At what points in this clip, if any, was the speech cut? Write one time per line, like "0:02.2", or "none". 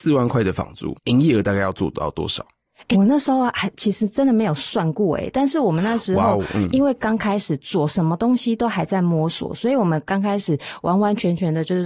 0:01.0
0:02.9